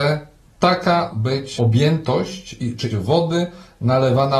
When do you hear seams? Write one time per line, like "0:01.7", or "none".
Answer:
0:01.1
0:01.6
0:02.9